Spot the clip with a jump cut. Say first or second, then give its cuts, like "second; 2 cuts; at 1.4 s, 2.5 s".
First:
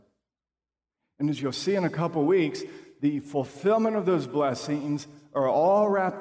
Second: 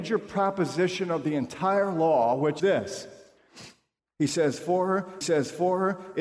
second; 3 cuts; at 2.6 s, 4.0 s, 5.2 s